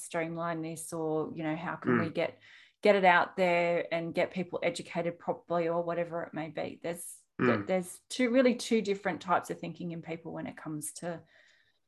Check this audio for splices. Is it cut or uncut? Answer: uncut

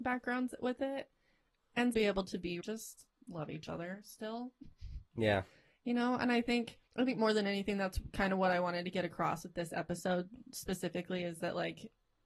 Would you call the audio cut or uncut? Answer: cut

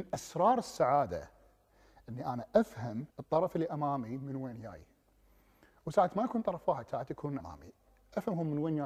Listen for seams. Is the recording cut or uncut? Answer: cut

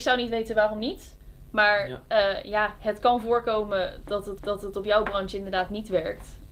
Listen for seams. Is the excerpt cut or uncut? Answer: cut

